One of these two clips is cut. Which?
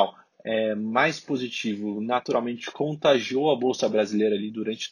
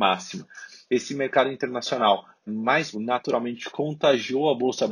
second; 2 cuts; at 2.5 s, 2.9 s

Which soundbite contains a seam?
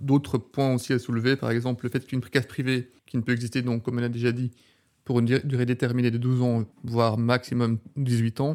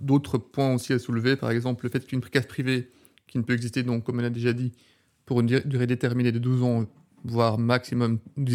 first; 2 cuts; at 3.0 s, 6.7 s

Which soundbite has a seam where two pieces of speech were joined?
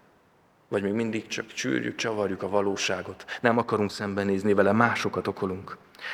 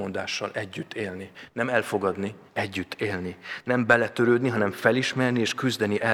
second; 1 cut; at 2.5 s

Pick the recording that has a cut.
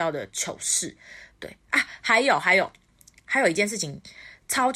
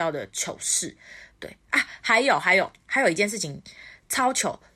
second; 1 cut; at 2.8 s

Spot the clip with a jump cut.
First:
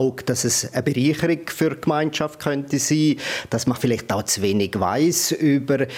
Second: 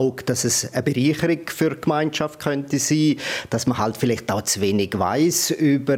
first; 1 cut; at 3.7 s

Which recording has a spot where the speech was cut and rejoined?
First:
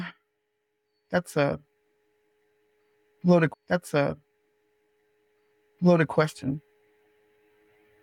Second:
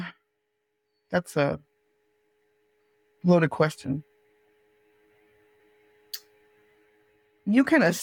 first; 1 cut; at 3.5 s

